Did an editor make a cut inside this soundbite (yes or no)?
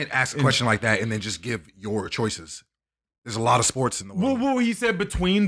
no